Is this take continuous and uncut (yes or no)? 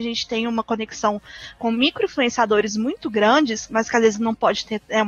yes